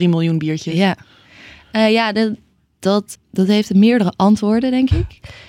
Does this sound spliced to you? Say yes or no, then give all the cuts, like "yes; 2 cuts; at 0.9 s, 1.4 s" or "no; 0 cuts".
yes; 1 cut; at 3.1 s